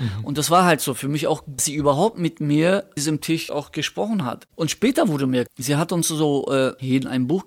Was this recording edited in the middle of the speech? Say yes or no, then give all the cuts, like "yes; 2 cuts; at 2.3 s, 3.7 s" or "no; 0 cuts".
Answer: yes; 4 cuts; at 1.6 s, 3.0 s, 3.5 s, 5.5 s